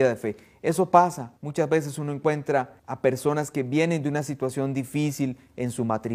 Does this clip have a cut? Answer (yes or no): yes